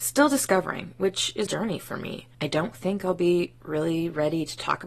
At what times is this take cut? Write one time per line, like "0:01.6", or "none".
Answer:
0:01.5
0:02.3